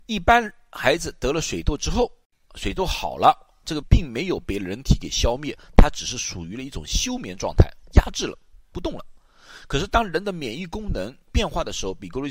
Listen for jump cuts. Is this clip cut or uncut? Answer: cut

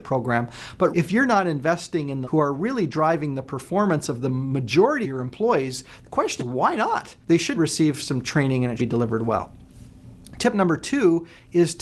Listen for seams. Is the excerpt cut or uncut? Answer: cut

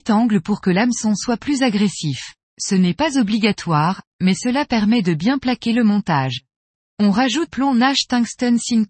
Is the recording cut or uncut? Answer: cut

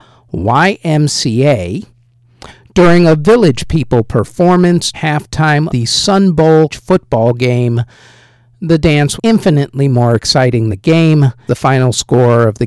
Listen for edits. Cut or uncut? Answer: cut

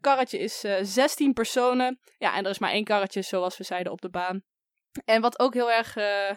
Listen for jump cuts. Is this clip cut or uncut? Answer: uncut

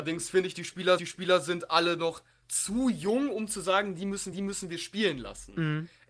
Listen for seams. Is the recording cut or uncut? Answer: cut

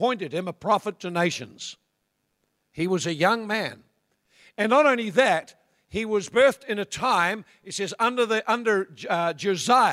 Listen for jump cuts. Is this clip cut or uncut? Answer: uncut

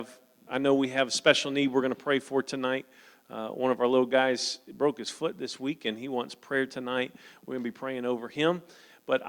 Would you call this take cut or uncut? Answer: uncut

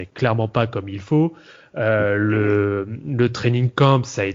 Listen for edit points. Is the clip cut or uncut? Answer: uncut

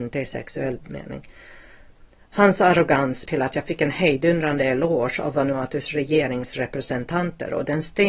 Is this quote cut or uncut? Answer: cut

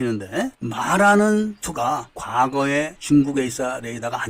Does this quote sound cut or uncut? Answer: uncut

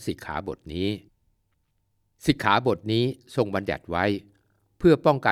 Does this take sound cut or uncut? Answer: uncut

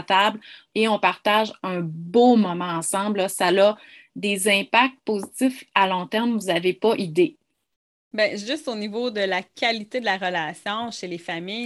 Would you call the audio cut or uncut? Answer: uncut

